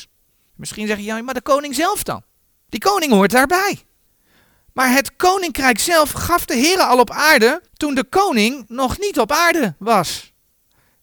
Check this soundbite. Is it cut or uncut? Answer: cut